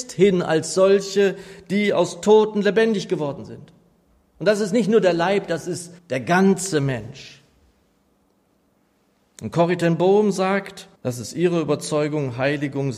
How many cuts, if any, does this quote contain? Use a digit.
2